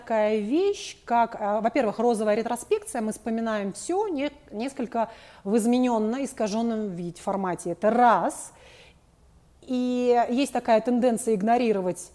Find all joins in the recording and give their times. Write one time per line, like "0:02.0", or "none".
none